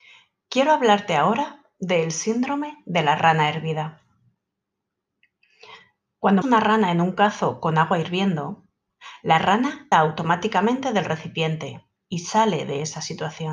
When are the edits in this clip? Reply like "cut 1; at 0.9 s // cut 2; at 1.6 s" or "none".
cut 1; at 6.4 s // cut 2; at 9.9 s